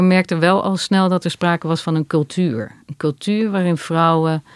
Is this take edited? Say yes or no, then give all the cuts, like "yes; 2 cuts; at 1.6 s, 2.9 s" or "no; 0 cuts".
no; 0 cuts